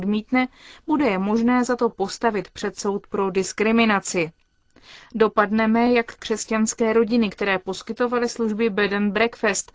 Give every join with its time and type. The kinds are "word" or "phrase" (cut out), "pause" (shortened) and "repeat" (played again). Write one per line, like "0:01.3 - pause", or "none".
none